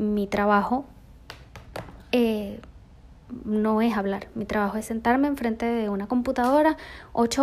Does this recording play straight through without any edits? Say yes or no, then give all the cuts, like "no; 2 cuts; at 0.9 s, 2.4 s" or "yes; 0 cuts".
yes; 0 cuts